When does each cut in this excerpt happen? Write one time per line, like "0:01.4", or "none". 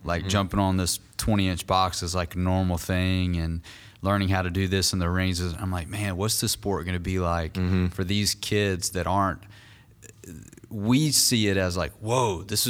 none